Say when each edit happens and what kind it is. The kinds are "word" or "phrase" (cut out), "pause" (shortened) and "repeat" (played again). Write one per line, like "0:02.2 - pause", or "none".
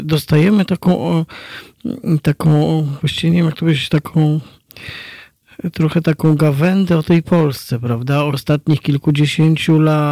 0:08.3 - word